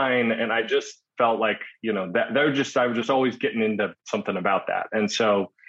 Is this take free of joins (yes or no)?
no